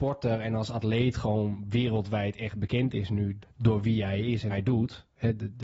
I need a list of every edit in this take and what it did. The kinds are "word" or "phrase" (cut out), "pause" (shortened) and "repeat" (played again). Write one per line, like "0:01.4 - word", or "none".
0:03.4 - word
0:04.5 - word